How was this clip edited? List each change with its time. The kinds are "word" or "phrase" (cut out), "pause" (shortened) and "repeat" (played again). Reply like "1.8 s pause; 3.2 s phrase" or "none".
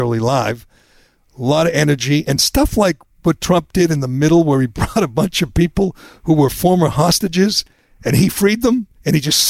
none